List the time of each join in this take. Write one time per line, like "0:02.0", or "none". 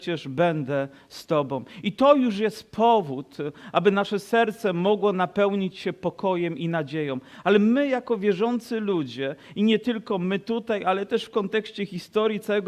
none

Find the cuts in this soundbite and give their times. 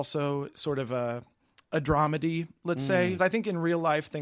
0:03.2

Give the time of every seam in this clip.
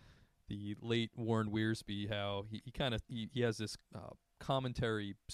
0:03.0
0:03.8

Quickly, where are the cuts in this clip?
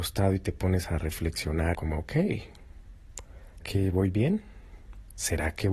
0:01.7
0:03.6

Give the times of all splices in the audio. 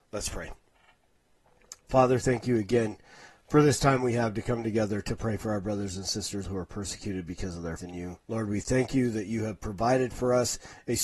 0:06.4
0:07.8
0:08.2

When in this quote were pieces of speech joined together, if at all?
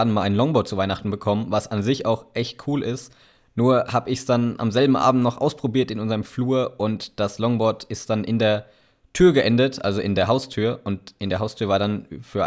none

